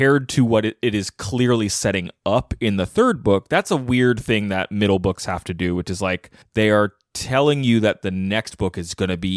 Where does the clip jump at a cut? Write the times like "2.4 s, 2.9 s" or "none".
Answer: 6.4 s